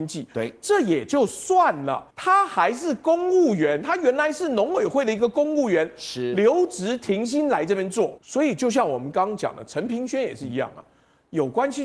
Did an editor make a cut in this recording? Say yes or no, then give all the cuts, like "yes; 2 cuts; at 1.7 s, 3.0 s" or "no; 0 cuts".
yes; 2 cuts; at 2.1 s, 8.2 s